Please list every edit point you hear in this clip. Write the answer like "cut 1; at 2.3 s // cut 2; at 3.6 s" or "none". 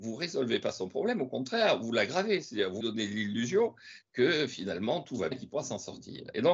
cut 1; at 2.8 s // cut 2; at 5.3 s